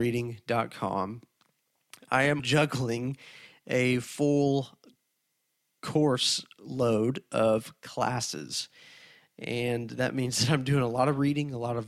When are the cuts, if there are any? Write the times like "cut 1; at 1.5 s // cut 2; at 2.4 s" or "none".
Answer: cut 1; at 2.4 s